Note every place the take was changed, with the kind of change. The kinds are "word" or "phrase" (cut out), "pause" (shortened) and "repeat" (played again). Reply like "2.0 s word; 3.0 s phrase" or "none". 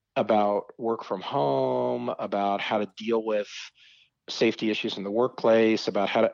none